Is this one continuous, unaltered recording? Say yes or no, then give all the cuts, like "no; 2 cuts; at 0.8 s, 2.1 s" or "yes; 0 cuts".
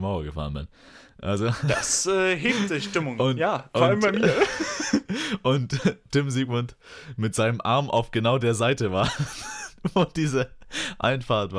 yes; 0 cuts